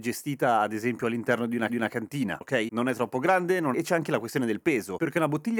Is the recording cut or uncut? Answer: cut